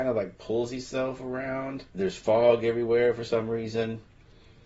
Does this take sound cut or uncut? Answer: cut